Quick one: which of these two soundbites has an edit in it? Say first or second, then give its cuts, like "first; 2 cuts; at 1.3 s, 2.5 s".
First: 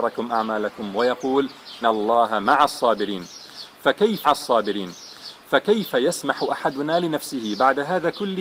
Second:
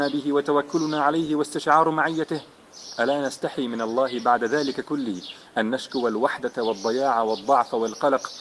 first; 2 cuts; at 1.8 s, 4.2 s